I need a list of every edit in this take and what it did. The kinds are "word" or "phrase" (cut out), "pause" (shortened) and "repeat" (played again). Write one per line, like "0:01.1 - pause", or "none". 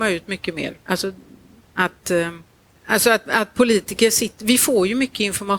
0:01.6 - phrase